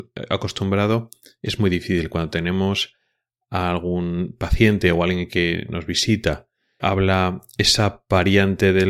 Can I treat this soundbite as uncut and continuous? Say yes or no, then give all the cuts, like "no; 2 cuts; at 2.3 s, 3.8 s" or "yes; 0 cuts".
no; 1 cut; at 6.8 s